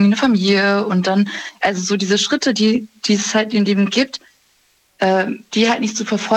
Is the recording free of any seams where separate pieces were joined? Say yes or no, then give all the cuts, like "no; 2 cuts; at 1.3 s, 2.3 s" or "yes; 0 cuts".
yes; 0 cuts